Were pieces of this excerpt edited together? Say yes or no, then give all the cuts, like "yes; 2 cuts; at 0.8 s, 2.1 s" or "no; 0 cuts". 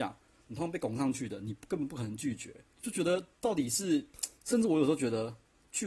yes; 3 cuts; at 2.7 s, 3.3 s, 4.4 s